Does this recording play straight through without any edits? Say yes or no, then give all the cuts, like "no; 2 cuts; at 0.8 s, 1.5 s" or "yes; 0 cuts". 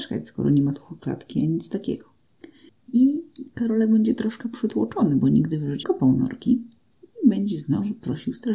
no; 1 cut; at 5.8 s